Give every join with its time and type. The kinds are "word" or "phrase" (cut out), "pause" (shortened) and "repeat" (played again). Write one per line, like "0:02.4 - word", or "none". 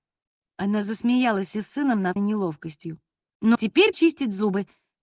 0:01.5 - word
0:02.2 - word
0:03.5 - word
0:03.9 - word